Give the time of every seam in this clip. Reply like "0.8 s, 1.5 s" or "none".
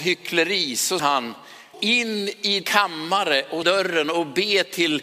1.0 s, 1.7 s, 2.6 s, 3.6 s